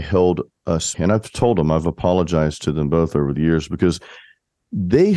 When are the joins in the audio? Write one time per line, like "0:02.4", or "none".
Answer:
0:00.9

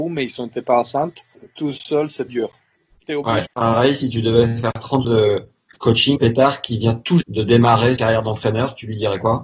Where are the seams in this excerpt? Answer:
0:02.3
0:03.5
0:05.0
0:06.2
0:07.2
0:08.0

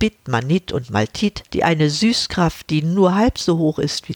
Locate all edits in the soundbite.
0:01.5

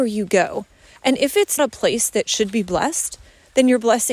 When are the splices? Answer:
0:01.6

